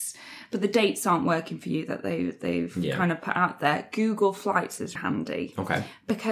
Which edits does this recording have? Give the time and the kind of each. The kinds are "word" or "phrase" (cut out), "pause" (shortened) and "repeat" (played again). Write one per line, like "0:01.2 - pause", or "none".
0:05.0 - word

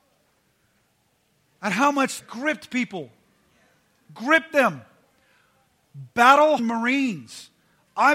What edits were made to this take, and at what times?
0:02.2 - phrase
0:06.6 - word

